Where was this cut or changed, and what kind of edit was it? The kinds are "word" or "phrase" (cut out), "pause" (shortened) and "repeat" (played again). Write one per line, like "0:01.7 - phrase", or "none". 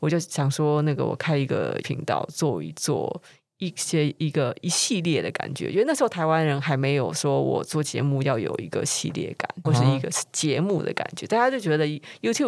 0:01.8 - word
0:09.6 - phrase